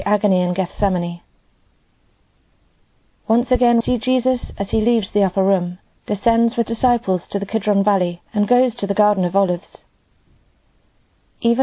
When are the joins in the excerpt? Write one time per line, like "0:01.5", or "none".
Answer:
0:03.8
0:05.9
0:06.6
0:08.3